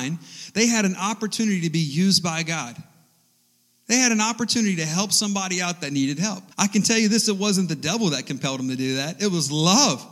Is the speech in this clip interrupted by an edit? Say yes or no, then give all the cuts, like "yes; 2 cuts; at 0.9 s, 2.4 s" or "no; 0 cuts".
yes; 1 cut; at 6.5 s